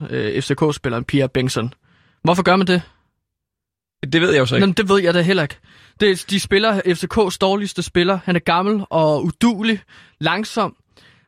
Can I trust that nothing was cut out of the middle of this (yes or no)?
yes